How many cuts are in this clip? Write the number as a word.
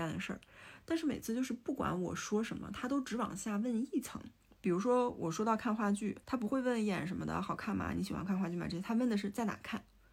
two